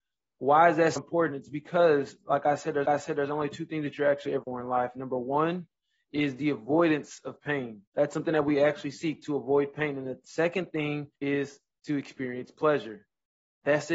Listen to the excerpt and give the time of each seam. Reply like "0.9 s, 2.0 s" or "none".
1.0 s, 2.8 s, 4.4 s, 7.9 s, 11.1 s